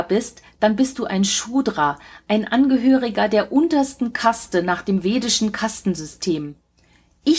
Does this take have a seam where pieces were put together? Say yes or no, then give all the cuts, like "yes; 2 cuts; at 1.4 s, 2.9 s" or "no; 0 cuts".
no; 0 cuts